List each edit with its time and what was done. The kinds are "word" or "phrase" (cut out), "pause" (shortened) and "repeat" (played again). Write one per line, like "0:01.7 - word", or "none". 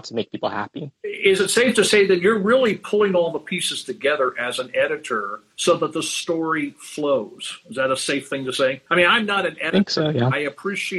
0:05.5 - pause
0:08.9 - pause